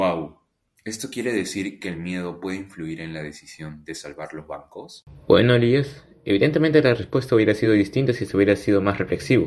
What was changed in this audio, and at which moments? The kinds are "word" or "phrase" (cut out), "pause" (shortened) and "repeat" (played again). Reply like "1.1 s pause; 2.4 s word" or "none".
none